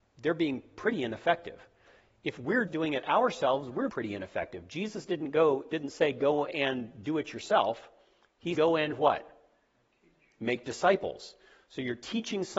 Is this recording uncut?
no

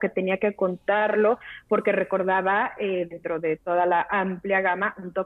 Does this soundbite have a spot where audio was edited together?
no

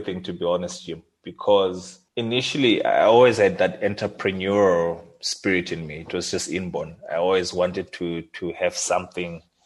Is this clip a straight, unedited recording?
no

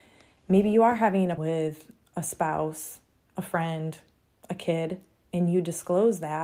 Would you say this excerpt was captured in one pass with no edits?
no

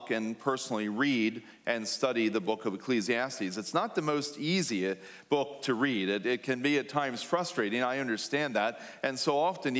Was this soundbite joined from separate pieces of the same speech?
no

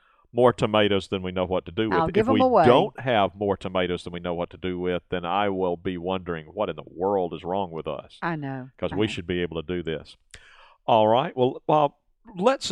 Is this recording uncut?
yes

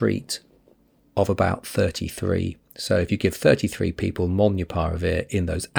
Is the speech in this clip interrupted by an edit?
no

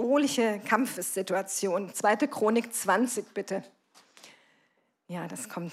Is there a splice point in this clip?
no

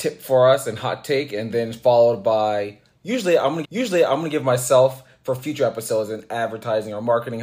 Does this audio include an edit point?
yes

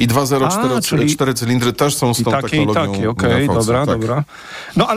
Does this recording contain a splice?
no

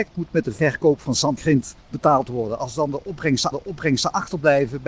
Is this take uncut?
no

